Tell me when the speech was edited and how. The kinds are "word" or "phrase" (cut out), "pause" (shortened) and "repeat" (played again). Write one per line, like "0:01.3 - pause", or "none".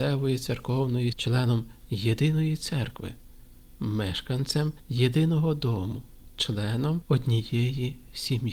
0:01.1 - word